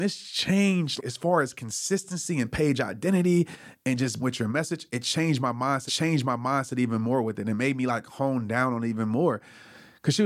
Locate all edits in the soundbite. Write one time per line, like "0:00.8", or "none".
0:01.0
0:04.2
0:05.9